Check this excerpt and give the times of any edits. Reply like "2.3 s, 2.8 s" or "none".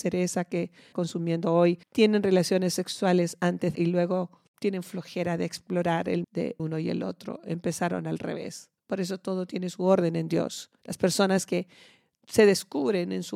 0.9 s, 1.8 s, 3.7 s, 4.5 s, 6.2 s, 6.6 s, 8.8 s, 10.8 s

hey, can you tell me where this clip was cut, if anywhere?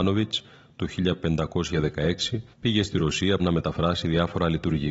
2.5 s, 3.4 s

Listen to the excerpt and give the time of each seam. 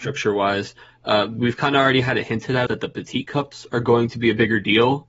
2.7 s

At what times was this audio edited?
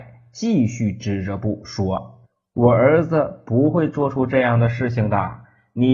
2.2 s

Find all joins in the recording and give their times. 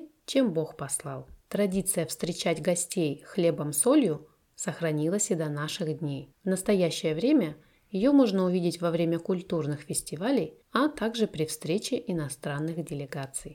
1.4 s, 6.3 s, 10.6 s

